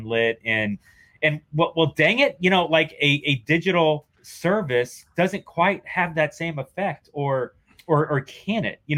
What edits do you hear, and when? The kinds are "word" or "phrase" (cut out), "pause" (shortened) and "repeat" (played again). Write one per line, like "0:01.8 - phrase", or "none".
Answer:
0:04.1 - pause
0:07.7 - pause